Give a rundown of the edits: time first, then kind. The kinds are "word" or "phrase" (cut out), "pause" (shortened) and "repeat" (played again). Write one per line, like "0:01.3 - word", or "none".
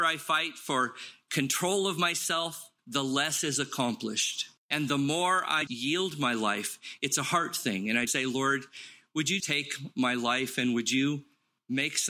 0:02.8 - pause
0:04.6 - pause
0:05.7 - word
0:08.1 - word
0:09.4 - word